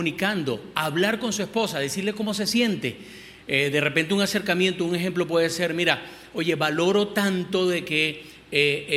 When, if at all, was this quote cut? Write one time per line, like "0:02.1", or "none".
none